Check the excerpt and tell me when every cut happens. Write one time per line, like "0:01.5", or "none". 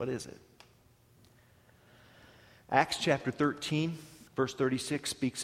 0:04.3